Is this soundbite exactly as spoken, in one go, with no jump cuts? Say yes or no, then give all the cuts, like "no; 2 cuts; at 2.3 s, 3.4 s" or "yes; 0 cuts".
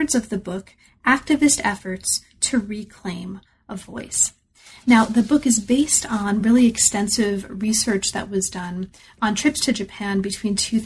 yes; 0 cuts